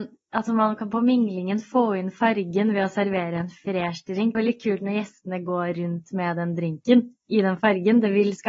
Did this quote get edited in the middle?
yes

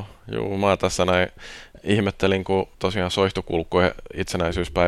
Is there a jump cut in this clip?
yes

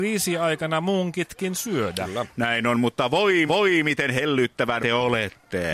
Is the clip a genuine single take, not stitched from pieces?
no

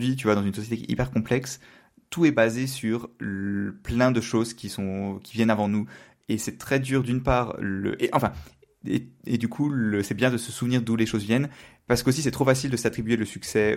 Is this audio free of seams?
yes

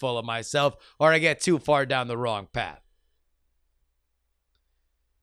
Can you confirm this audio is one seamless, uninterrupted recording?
yes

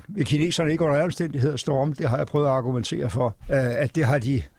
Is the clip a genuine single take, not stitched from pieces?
no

